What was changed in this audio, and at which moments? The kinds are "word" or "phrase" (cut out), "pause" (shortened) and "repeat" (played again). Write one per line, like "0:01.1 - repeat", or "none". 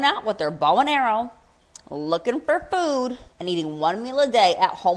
0:03.3 - pause